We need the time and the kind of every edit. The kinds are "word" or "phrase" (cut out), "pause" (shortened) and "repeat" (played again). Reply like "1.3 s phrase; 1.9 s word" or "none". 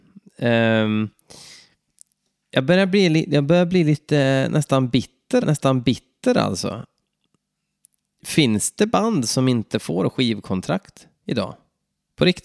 5.4 s repeat